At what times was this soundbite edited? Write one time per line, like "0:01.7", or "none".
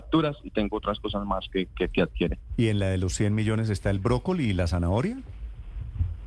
none